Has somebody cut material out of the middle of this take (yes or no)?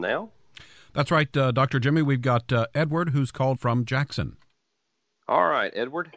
yes